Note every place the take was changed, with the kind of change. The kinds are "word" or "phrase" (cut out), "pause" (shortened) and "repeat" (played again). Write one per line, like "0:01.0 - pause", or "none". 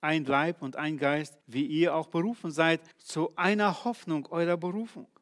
0:01.4 - pause
0:02.9 - pause